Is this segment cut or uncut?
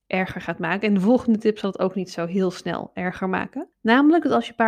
cut